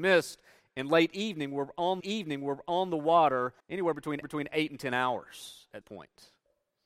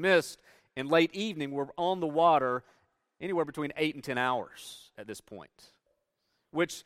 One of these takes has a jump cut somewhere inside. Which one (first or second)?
first